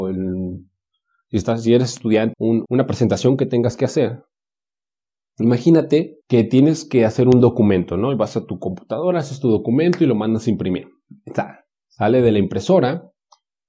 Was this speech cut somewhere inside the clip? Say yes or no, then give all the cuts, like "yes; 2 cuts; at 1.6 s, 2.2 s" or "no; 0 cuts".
yes; 3 cuts; at 2.3 s, 2.6 s, 6.2 s